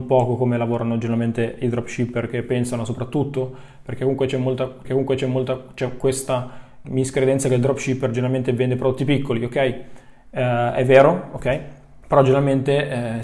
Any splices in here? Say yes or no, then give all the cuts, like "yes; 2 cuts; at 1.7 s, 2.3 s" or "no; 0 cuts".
yes; 3 cuts; at 4.8 s, 6.8 s, 12.0 s